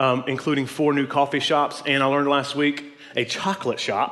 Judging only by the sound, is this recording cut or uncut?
uncut